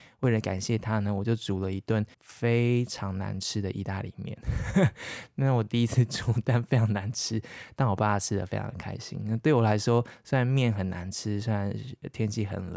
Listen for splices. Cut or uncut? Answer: cut